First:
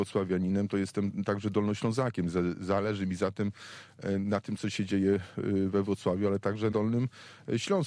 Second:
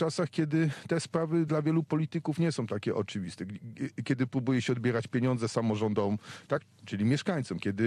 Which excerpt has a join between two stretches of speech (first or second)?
first